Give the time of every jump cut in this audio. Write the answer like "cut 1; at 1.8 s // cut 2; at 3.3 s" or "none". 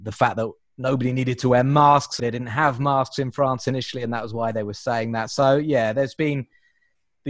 cut 1; at 2.2 s